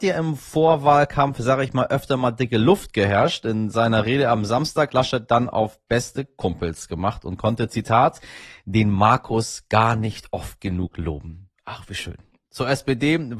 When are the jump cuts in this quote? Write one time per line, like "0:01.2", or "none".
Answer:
0:04.9